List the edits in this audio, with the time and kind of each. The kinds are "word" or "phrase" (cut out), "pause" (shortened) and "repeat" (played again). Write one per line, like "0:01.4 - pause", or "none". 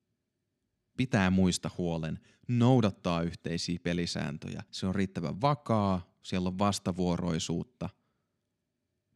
0:04.7 - pause